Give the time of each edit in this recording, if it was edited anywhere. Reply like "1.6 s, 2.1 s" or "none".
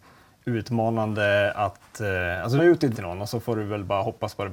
2.6 s, 2.9 s